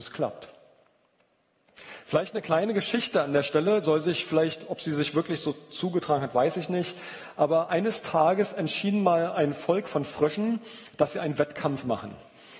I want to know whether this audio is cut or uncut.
uncut